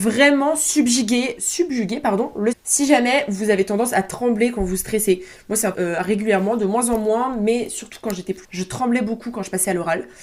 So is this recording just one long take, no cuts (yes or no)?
no